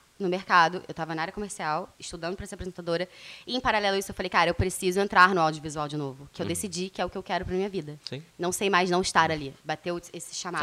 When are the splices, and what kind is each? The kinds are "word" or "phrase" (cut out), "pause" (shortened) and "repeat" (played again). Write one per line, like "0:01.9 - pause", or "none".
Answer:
0:01.9 - pause
0:08.3 - pause
0:09.6 - pause

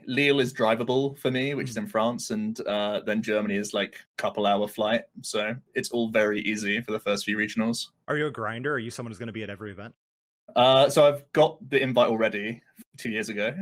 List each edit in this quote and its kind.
0:04.1 - pause
0:10.3 - pause

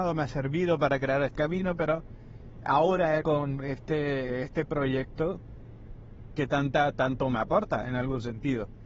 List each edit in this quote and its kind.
0:01.3 - word
0:03.2 - phrase

